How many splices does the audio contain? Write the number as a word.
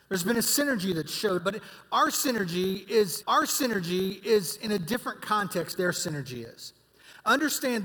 three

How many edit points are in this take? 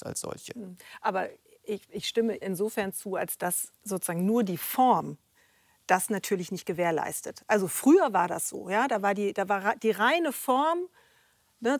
one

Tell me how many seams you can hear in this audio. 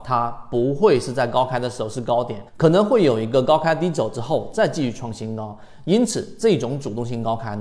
one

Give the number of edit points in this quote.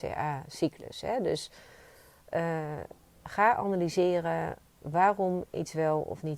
zero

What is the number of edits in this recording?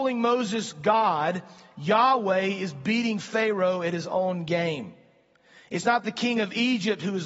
zero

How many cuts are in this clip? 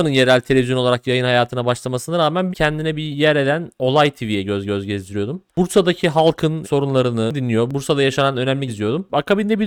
four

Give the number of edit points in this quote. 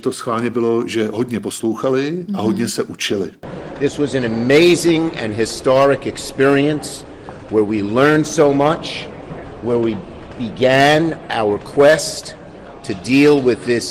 zero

